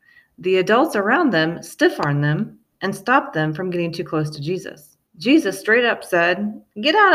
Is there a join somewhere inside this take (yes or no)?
yes